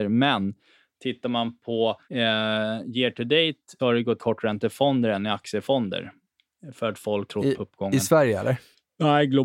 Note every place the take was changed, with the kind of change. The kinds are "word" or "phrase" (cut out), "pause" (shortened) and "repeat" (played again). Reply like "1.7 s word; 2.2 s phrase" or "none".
2.0 s pause; 3.8 s word; 4.2 s phrase; 7.3 s phrase

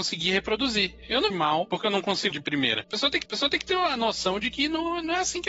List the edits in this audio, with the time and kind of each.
1.3 s phrase; 2.3 s phrase; 3.3 s repeat

